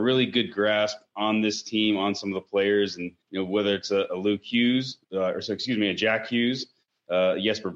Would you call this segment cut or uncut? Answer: cut